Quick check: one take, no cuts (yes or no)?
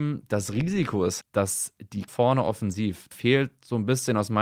no